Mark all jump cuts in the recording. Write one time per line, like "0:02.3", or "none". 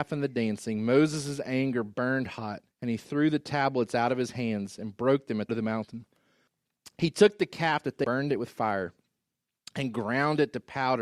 0:02.7
0:05.5
0:08.0